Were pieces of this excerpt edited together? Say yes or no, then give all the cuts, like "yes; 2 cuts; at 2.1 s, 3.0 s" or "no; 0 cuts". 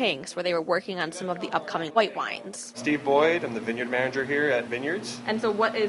yes; 1 cut; at 4.7 s